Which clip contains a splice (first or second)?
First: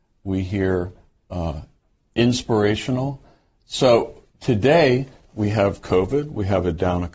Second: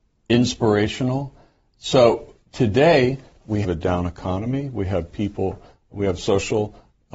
second